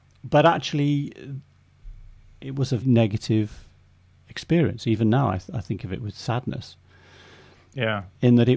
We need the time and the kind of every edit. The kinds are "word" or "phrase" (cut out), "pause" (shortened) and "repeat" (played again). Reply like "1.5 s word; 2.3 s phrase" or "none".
2.8 s word